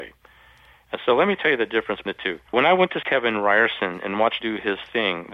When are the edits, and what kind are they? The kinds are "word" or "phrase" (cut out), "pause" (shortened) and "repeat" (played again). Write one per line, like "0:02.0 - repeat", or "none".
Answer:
0:02.1 - word
0:02.5 - pause
0:03.0 - word
0:04.4 - word